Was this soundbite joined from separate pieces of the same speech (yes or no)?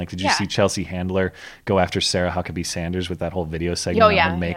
no